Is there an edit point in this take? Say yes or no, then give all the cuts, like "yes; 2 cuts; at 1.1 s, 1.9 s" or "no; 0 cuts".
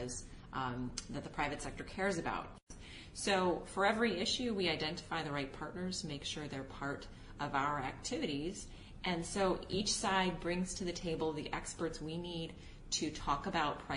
no; 0 cuts